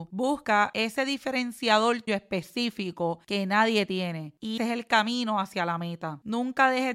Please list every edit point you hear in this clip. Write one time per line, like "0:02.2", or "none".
0:02.1
0:04.6